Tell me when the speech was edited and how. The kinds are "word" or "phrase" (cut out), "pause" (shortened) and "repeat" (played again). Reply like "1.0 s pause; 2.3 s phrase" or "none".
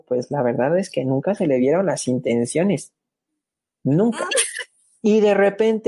none